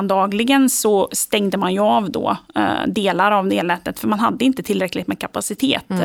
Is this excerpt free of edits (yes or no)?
yes